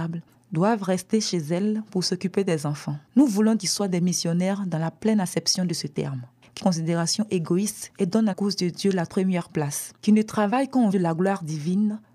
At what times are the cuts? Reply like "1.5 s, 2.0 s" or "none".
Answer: 3.1 s, 3.6 s, 6.6 s, 8.3 s, 9.1 s, 10.0 s, 10.9 s